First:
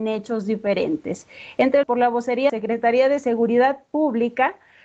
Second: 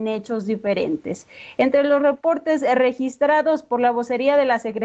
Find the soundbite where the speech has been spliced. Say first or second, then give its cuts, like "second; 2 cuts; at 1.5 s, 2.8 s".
first; 2 cuts; at 1.8 s, 2.5 s